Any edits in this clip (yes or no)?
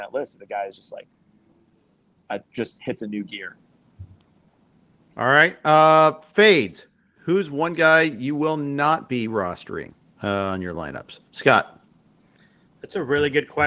no